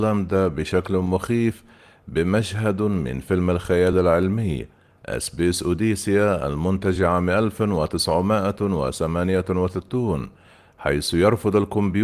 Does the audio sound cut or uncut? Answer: uncut